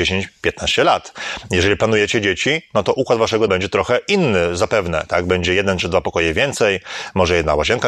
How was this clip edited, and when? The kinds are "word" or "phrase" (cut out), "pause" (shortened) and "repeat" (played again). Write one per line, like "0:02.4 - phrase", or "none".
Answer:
0:03.5 - word